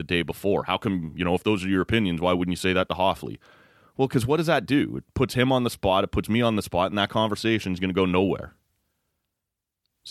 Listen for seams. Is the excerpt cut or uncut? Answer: uncut